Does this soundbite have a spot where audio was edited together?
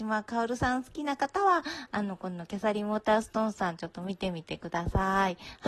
no; 0 cuts

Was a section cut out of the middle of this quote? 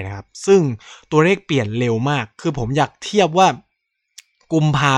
no; 0 cuts

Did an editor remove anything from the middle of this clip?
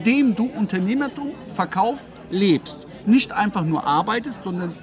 no; 0 cuts

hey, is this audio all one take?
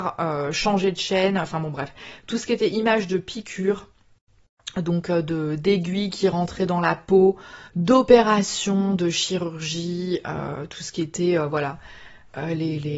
no; 1 cut; at 7.7 s

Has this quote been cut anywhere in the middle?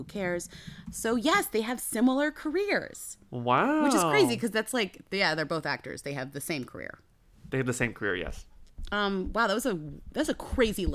no; 0 cuts

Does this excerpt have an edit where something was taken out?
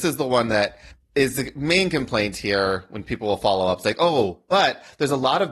no; 0 cuts

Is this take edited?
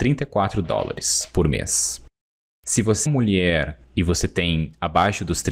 yes; 2 cuts; at 3.1 s, 3.8 s

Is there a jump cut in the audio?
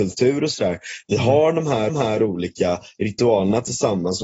yes; 1 cut; at 1.9 s

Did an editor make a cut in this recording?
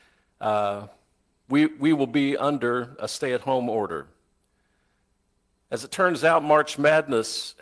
no; 0 cuts

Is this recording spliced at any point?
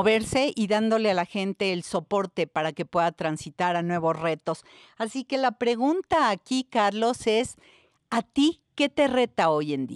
no; 0 cuts

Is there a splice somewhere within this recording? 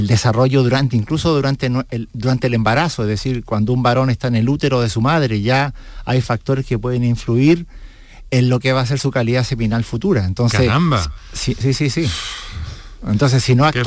no; 0 cuts

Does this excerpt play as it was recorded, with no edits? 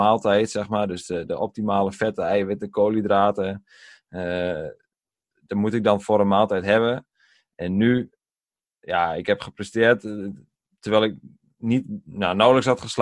yes; 0 cuts

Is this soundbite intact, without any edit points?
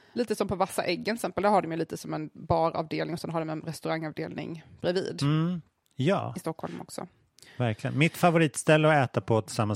yes; 0 cuts

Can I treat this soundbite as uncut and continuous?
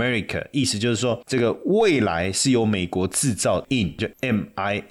no; 2 cuts; at 3.6 s, 4.0 s

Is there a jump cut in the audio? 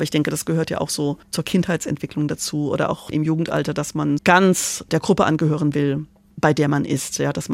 yes; 3 cuts; at 1.2 s, 3.1 s, 4.2 s

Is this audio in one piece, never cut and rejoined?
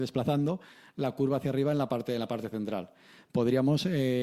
yes; 0 cuts

